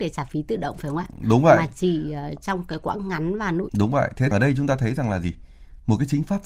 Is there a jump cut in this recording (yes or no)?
yes